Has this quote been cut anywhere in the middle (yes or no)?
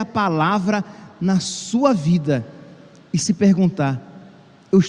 no